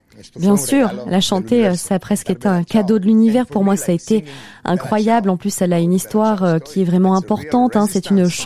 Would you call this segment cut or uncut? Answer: uncut